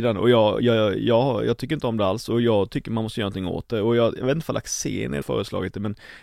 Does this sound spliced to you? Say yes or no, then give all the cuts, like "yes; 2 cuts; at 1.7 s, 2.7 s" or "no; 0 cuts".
yes; 1 cut; at 5.2 s